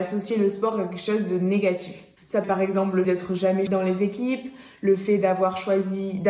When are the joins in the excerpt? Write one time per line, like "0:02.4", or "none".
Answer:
0:02.4
0:03.0
0:03.7